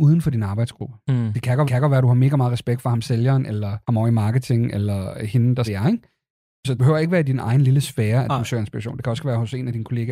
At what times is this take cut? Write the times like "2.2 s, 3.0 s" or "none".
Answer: 1.6 s, 3.8 s, 5.6 s, 6.8 s